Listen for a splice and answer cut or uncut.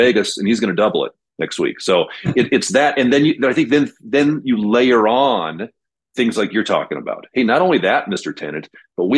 uncut